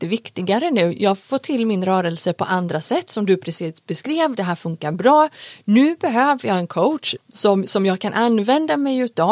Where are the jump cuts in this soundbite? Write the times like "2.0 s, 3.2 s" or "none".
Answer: 7.2 s